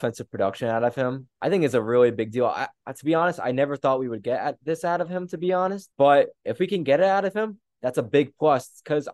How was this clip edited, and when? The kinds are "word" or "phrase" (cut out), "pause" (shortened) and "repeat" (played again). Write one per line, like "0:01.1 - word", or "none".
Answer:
0:01.3 - pause
0:05.9 - pause